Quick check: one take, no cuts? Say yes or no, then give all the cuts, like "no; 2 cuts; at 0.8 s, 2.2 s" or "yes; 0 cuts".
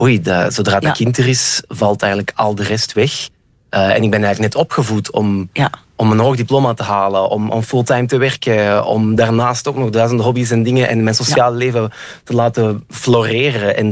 yes; 0 cuts